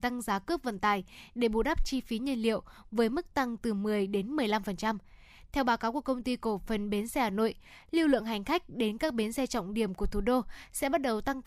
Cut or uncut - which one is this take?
uncut